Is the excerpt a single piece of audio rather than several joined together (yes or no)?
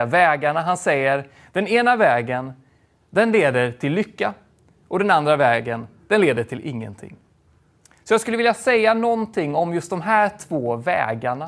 yes